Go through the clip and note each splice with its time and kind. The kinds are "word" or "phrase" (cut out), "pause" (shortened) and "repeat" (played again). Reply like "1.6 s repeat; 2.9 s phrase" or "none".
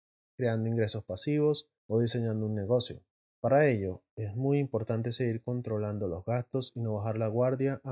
1.8 s pause; 3.3 s pause